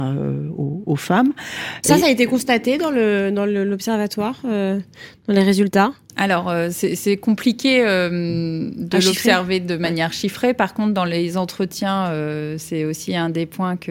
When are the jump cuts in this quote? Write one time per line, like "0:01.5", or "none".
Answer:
none